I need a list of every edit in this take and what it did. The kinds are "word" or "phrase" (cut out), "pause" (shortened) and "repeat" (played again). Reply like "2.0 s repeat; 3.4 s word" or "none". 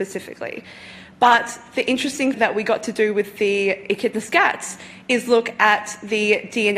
2.3 s word